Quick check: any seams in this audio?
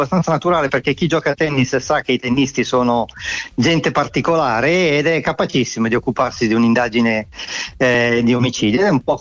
no; 0 cuts

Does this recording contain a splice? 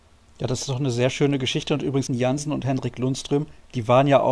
yes; 1 cut; at 2.1 s

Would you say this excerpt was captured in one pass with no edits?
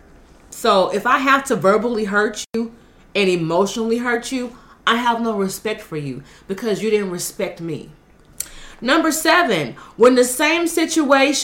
yes; 0 cuts

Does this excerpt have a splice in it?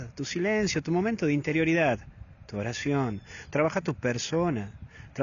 no; 0 cuts

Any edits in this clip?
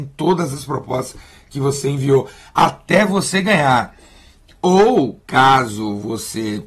no; 0 cuts

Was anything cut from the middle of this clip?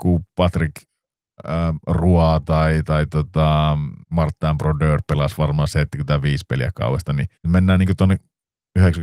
yes; 2 cuts; at 4.0 s, 7.4 s

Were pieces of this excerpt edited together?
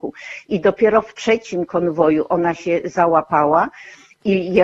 no; 0 cuts

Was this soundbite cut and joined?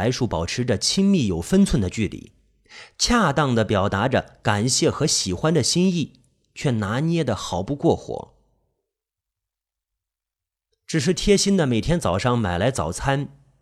no; 0 cuts

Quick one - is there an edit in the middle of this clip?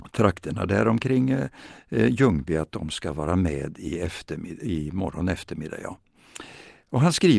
no; 0 cuts

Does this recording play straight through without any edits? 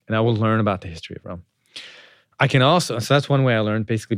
yes; 0 cuts

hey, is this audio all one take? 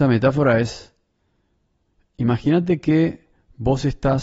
yes; 0 cuts

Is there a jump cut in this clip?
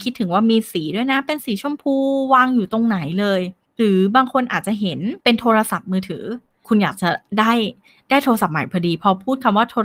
yes; 3 cuts; at 3.6 s, 5.2 s, 6.6 s

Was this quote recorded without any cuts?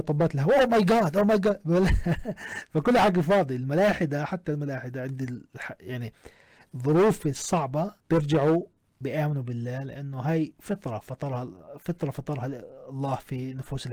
no; 1 cut; at 8.0 s

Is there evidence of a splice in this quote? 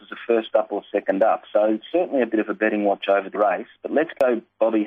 yes; 1 cut; at 3.4 s

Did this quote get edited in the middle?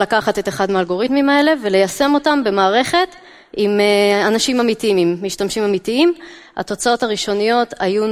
no; 0 cuts

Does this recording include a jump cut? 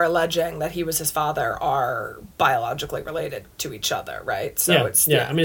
no; 0 cuts

